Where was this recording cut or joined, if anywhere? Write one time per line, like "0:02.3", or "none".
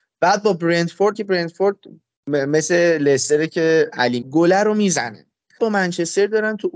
0:01.1
0:02.2
0:04.2
0:05.6